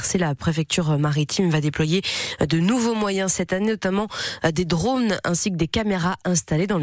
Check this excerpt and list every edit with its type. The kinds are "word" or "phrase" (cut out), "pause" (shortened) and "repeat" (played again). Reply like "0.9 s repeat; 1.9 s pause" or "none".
none